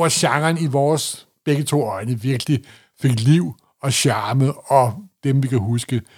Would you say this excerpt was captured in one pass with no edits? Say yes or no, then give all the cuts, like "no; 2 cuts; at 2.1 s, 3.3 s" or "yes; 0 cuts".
yes; 0 cuts